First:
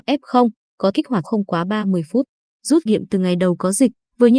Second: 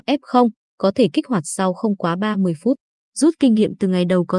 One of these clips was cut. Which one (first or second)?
first